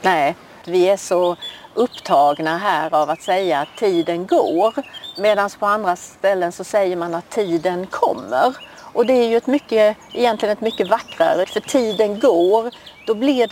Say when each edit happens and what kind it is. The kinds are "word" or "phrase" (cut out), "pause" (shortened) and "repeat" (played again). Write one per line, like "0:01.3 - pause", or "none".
0:11.4 - word